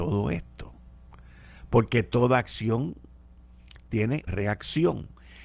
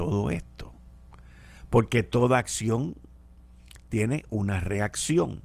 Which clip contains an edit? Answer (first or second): first